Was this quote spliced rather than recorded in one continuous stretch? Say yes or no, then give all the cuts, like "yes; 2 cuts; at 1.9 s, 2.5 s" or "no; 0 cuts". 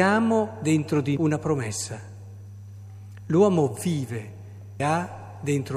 yes; 2 cuts; at 1.2 s, 4.8 s